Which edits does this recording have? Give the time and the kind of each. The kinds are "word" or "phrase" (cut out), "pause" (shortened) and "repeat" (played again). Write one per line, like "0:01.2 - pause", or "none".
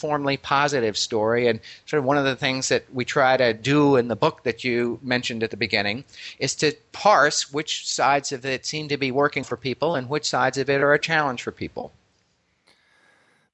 0:09.4 - word